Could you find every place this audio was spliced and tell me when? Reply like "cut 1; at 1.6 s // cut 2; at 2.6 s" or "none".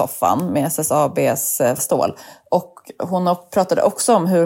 cut 1; at 1.8 s